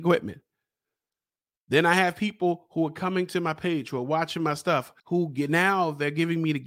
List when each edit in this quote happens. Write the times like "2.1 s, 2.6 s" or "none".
5.0 s